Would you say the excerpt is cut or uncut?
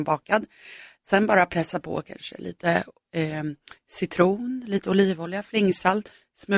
uncut